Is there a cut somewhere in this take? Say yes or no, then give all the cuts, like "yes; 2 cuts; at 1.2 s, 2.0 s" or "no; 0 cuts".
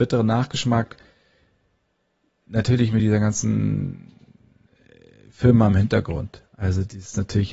no; 0 cuts